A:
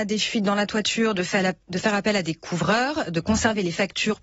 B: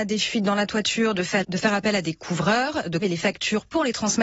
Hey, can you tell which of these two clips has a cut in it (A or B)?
B